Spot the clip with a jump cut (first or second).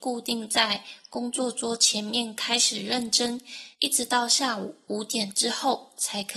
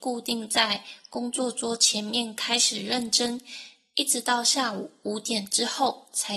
first